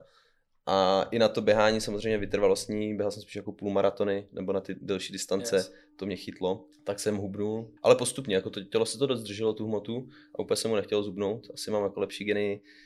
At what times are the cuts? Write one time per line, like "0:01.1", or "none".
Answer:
0:06.7
0:07.8